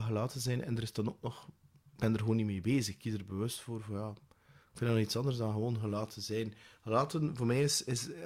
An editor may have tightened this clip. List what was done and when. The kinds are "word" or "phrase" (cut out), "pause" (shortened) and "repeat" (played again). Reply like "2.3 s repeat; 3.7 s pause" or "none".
none